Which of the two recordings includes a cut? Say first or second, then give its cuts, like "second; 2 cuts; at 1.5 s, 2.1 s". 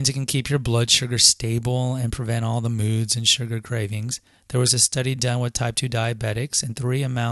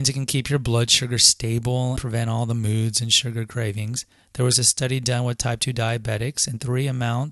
second; 1 cut; at 2.0 s